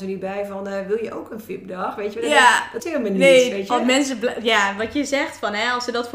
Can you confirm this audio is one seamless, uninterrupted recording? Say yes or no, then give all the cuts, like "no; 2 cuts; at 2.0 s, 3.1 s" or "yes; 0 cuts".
no; 1 cut; at 2.8 s